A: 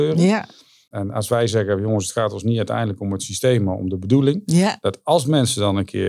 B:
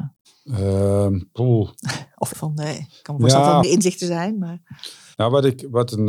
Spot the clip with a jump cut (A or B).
B